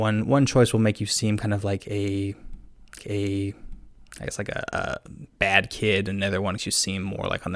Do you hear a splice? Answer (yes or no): yes